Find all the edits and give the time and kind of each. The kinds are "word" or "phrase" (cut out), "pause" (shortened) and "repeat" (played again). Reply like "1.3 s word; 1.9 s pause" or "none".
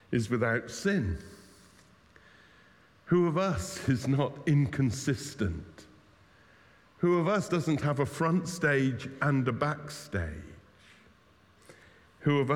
none